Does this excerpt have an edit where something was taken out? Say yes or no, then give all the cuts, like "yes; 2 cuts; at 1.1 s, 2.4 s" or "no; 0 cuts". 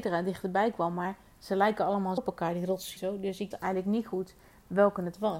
yes; 3 cuts; at 2.2 s, 3.0 s, 3.5 s